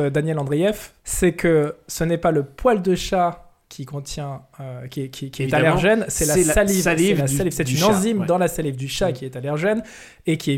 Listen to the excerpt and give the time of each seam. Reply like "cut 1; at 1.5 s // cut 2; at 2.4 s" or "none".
cut 1; at 1.0 s